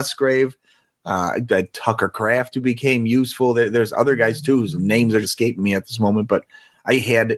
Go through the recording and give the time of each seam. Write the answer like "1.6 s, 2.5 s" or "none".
5.2 s